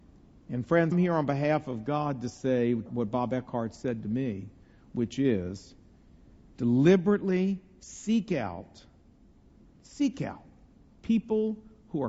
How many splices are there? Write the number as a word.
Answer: one